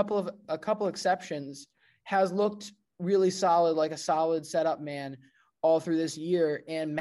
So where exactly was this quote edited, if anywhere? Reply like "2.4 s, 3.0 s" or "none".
none